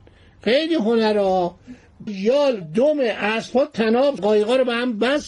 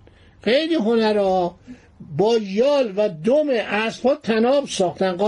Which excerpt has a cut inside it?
first; 3 cuts; at 2.1 s, 2.6 s, 4.2 s

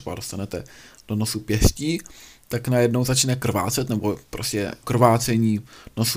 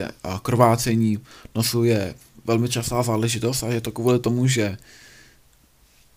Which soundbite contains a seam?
first; 1 cut; at 4.8 s

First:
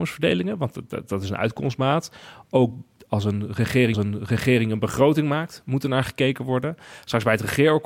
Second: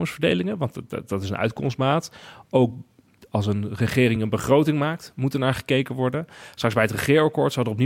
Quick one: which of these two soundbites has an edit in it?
first; 2 cuts; at 2.9 s, 3.9 s

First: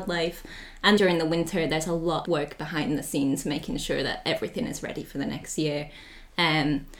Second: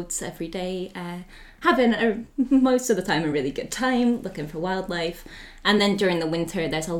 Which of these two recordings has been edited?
first; 2 cuts; at 1.0 s, 2.2 s

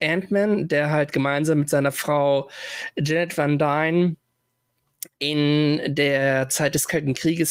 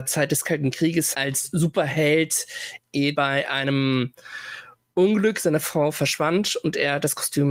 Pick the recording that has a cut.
second; 3 cuts; at 1.1 s, 2.8 s, 3.1 s

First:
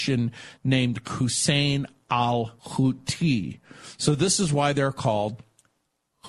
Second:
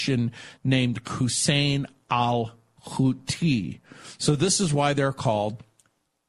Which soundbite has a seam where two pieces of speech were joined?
first; 1 cut; at 2.6 s

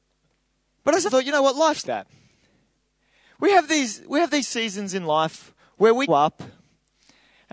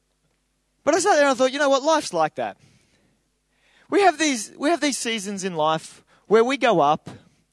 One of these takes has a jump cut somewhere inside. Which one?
first; 3 cuts; at 1.1 s, 1.8 s, 6.1 s

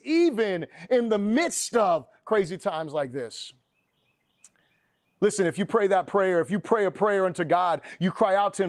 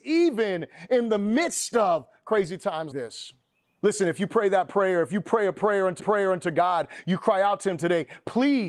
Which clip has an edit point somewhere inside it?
second; 3 cuts; at 2.9 s, 3.6 s, 6.0 s

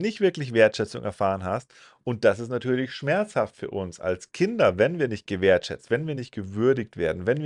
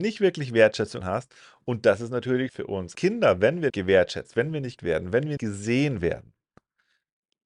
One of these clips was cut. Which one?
second; 6 cuts; at 1.0 s, 2.5 s, 2.9 s, 3.7 s, 4.8 s, 5.4 s

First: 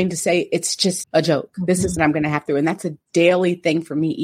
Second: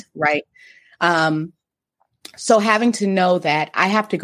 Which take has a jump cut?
first; 3 cuts; at 1.0 s, 2.0 s, 2.5 s

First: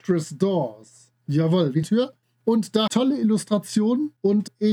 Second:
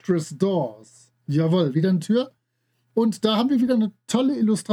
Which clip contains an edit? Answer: first; 3 cuts; at 1.8 s, 2.2 s, 2.9 s

